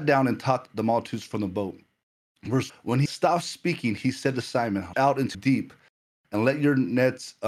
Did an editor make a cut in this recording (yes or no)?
yes